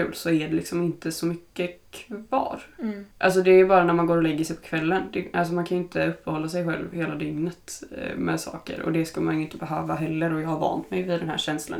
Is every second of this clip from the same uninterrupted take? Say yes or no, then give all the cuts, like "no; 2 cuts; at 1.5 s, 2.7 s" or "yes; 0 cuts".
no; 1 cut; at 3.1 s